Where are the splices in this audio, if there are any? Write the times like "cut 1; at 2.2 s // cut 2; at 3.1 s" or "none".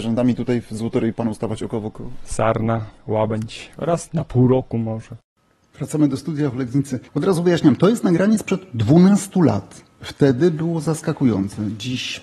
cut 1; at 1.1 s // cut 2; at 7.1 s